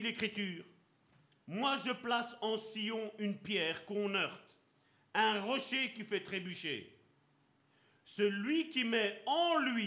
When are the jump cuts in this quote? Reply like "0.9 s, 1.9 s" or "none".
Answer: none